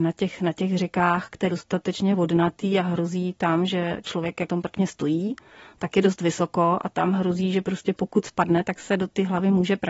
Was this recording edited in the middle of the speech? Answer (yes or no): yes